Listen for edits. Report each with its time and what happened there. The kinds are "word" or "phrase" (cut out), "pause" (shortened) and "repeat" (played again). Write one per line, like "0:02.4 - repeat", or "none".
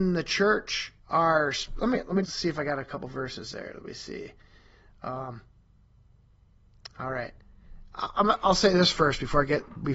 0:01.0 - pause
0:02.2 - word